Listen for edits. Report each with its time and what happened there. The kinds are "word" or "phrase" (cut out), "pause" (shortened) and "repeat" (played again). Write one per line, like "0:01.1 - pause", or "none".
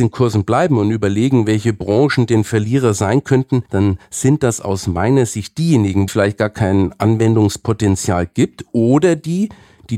0:03.7 - pause
0:06.1 - phrase